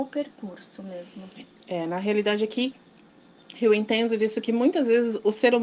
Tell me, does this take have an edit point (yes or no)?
no